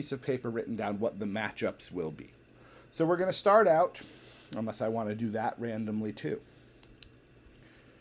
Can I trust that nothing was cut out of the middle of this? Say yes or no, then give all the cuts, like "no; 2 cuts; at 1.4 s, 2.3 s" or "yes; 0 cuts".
yes; 0 cuts